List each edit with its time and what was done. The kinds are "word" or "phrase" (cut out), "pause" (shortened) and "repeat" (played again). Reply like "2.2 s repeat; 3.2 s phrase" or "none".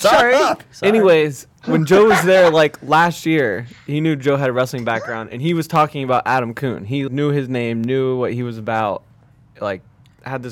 7.1 s word